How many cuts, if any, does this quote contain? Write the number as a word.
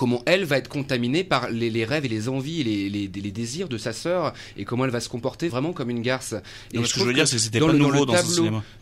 one